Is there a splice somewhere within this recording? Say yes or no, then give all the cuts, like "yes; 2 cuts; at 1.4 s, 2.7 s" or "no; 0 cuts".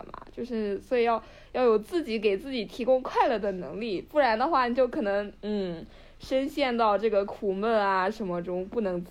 no; 0 cuts